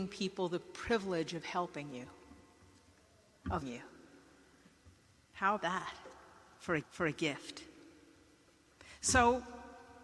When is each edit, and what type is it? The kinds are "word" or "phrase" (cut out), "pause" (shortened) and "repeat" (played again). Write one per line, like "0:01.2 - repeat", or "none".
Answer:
0:03.6 - word
0:05.6 - word
0:06.8 - repeat